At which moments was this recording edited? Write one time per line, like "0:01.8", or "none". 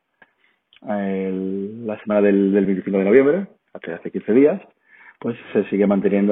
none